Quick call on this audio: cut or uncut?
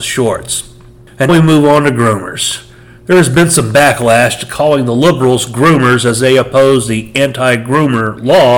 cut